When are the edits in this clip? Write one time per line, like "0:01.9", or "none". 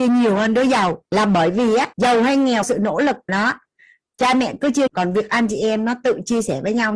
0:01.1
0:01.9
0:02.6
0:03.3
0:04.9